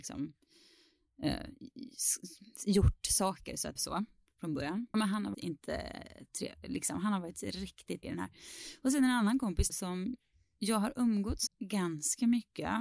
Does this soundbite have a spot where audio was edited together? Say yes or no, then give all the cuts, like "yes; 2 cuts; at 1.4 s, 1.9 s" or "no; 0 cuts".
yes; 6 cuts; at 3.8 s, 4.9 s, 5.3 s, 8.0 s, 9.7 s, 11.5 s